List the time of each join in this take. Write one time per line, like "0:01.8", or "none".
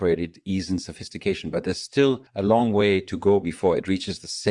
0:02.3